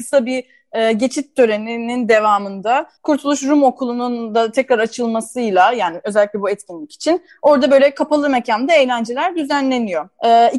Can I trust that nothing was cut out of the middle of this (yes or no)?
no